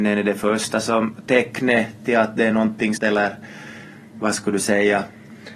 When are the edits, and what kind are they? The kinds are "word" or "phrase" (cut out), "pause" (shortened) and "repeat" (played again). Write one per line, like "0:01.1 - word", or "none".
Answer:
0:03.0 - phrase